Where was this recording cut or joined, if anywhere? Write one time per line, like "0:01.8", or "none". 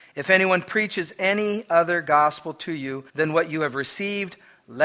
0:03.1